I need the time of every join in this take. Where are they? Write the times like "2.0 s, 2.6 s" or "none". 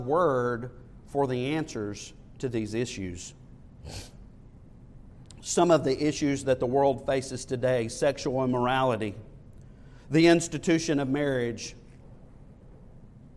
none